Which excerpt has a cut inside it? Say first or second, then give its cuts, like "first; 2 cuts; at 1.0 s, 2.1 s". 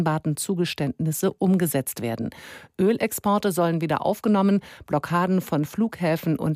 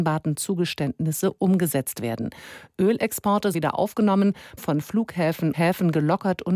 second; 3 cuts; at 3.5 s, 4.6 s, 5.5 s